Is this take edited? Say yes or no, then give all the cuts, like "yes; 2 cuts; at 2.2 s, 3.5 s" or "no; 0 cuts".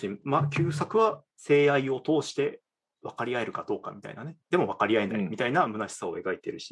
no; 0 cuts